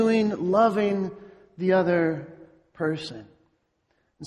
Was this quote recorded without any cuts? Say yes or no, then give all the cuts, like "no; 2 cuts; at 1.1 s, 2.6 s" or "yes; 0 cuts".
yes; 0 cuts